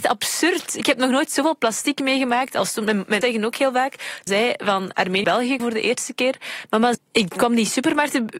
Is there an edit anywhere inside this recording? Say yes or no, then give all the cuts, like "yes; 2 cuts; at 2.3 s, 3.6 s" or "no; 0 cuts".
yes; 5 cuts; at 3.2 s, 4.3 s, 5.2 s, 5.6 s, 6.9 s